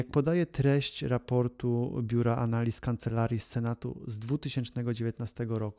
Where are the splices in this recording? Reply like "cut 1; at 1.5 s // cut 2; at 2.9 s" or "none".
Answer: none

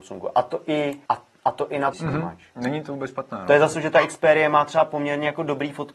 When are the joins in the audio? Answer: cut 1; at 1.0 s // cut 2; at 1.9 s // cut 3; at 3.7 s

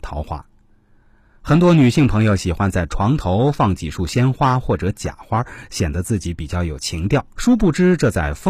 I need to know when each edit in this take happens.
cut 1; at 7.3 s

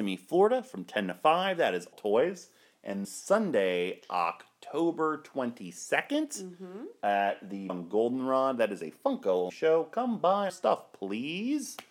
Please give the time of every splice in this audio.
cut 1; at 1.9 s // cut 2; at 3.0 s // cut 3; at 7.7 s // cut 4; at 9.5 s // cut 5; at 10.5 s

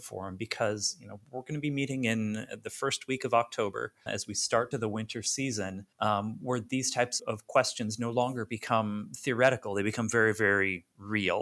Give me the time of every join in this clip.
cut 1; at 4.1 s // cut 2; at 4.7 s // cut 3; at 5.9 s // cut 4; at 7.2 s

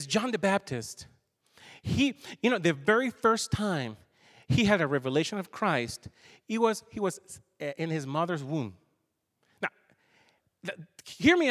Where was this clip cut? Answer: none

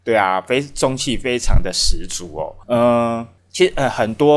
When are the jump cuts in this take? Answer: cut 1; at 2.6 s // cut 2; at 3.4 s

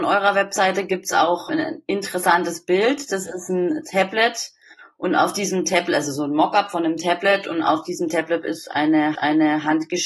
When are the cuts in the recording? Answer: cut 1; at 1.5 s // cut 2; at 9.1 s

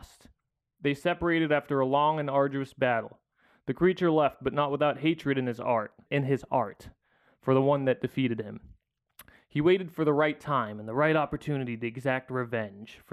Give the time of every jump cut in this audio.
cut 1; at 6.1 s

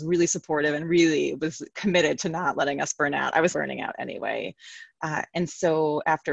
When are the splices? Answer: cut 1; at 3.5 s

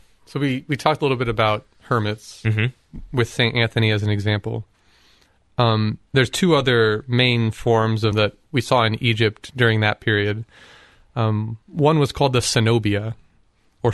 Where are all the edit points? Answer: cut 1; at 6.1 s // cut 2; at 8.1 s // cut 3; at 11.6 s

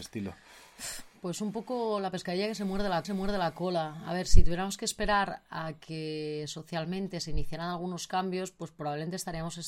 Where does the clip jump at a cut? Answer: cut 1; at 3.0 s

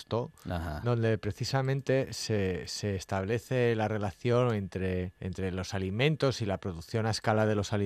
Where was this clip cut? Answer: cut 1; at 5.2 s

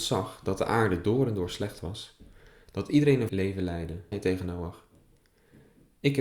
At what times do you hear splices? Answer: cut 1; at 3.3 s // cut 2; at 4.1 s

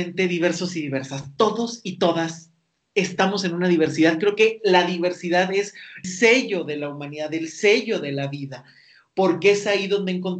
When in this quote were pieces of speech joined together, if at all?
cut 1; at 6.0 s

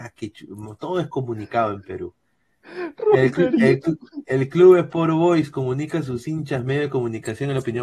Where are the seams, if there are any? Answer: none

